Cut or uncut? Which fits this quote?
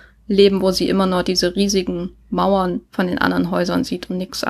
uncut